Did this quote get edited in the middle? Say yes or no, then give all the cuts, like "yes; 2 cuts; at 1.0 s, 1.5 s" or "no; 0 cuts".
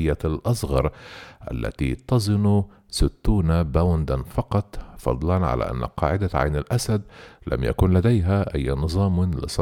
no; 0 cuts